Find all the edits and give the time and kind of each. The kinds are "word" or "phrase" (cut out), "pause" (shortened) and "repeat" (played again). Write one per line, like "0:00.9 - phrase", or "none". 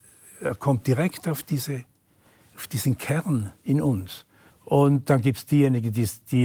0:03.5 - pause
0:04.5 - pause